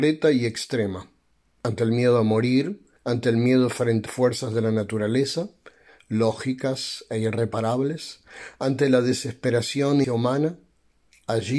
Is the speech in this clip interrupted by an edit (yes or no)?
yes